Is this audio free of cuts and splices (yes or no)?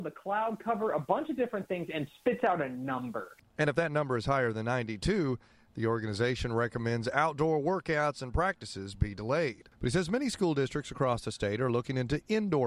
yes